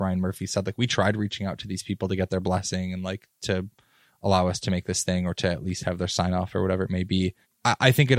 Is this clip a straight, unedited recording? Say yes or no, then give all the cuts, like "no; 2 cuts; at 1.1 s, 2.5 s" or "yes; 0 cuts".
yes; 0 cuts